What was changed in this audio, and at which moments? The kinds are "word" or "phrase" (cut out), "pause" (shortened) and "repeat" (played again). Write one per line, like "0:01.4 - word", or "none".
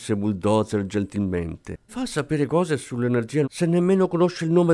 0:01.9 - word
0:02.5 - word
0:03.4 - word